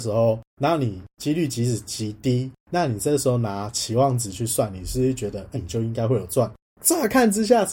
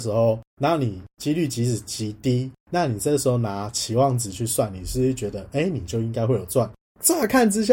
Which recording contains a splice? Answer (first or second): first